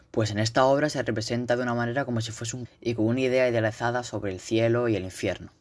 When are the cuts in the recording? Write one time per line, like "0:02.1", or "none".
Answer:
0:02.6